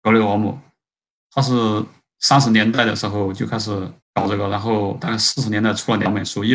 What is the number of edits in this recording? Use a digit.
1